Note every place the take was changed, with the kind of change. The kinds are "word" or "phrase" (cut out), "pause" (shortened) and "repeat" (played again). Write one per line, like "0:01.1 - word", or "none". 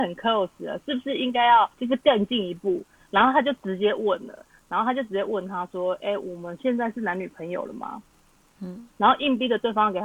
0:01.7 - pause
0:08.9 - pause